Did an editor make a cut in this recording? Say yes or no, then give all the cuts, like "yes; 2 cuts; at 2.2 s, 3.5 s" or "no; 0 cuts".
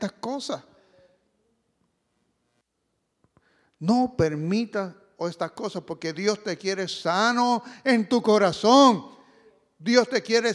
no; 0 cuts